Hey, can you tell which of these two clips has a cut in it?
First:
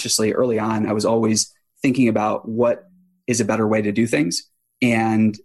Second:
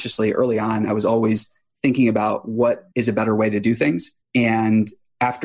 second; 2 cuts; at 2.9 s, 4.2 s

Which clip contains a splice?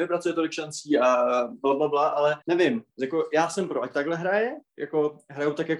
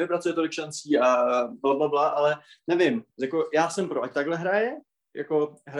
first; 2 cuts; at 2.4 s, 4.7 s

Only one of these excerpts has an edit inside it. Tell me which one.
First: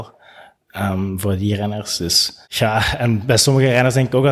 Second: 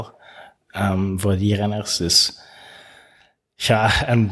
first; 1 cut; at 2.4 s

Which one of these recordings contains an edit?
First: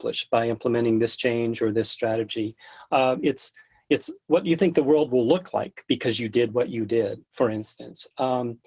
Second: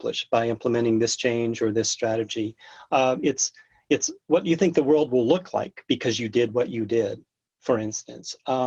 first; 1 cut; at 7.3 s

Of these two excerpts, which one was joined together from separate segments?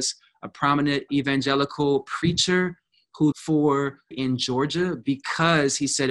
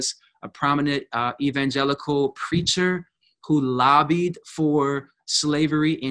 first; 3 cuts; at 1.1 s, 3.3 s, 4.1 s

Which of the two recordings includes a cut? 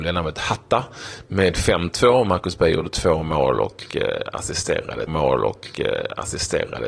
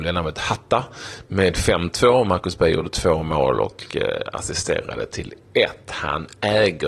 first; 1 cut; at 5.1 s

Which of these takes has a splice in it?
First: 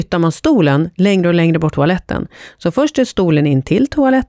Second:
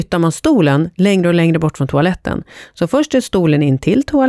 first; 1 cut; at 1.7 s

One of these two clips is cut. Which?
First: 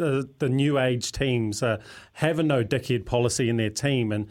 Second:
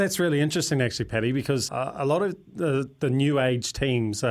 second; 1 cut; at 1.7 s

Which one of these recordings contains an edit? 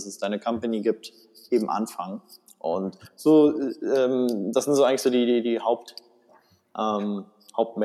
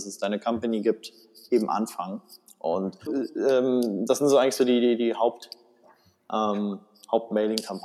second; 1 cut; at 3.1 s

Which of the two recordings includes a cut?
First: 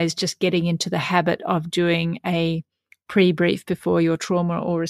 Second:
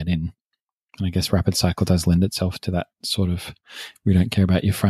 second; 1 cut; at 2.9 s

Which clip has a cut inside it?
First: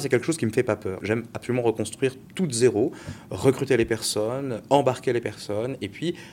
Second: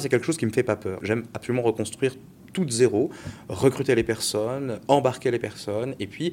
first; 1 cut; at 2.3 s

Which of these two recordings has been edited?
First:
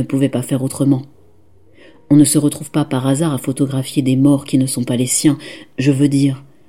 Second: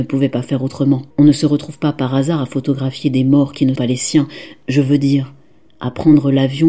second; 2 cuts; at 1.1 s, 3.8 s

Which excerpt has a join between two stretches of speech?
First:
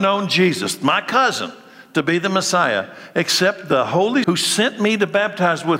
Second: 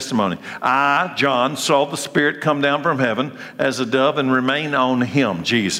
first; 1 cut; at 4.2 s

